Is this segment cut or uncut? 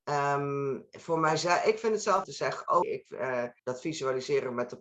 cut